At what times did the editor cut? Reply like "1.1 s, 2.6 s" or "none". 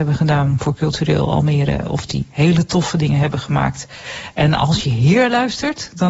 none